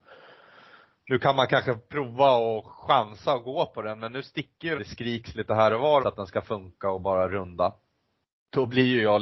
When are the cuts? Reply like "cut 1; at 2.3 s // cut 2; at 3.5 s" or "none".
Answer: cut 1; at 4.8 s // cut 2; at 6.0 s